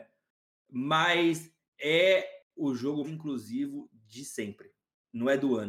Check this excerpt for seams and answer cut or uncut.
cut